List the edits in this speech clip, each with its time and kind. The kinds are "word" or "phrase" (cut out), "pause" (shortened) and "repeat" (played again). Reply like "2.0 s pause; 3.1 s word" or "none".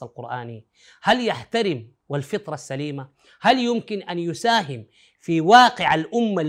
2.0 s phrase

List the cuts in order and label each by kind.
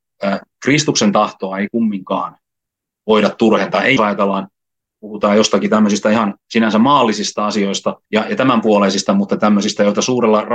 4.0 s phrase; 8.1 s pause

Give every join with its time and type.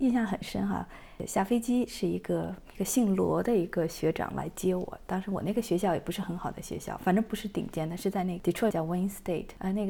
8.7 s word

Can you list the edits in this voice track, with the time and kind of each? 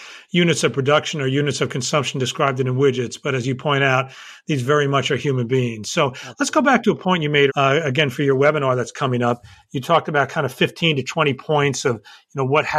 7.5 s word

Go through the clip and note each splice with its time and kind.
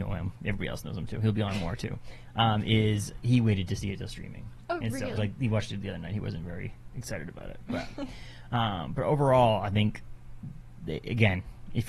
5.2 s word

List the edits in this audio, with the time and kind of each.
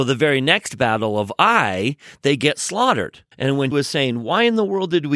3.3 s pause; 3.7 s word

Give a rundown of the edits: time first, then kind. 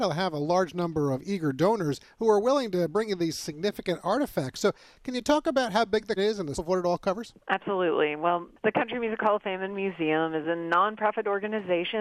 6.2 s word; 6.5 s word; 7.4 s pause

